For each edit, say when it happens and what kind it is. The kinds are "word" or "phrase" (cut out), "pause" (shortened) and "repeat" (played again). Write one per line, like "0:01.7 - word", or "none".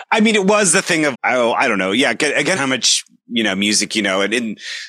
0:01.1 - word
0:02.6 - phrase